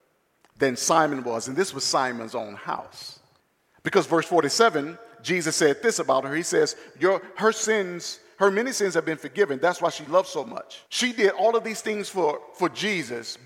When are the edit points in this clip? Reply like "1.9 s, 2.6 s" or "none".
3.4 s, 10.9 s